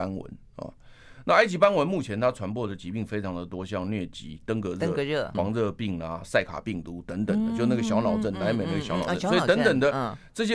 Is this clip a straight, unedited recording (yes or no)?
no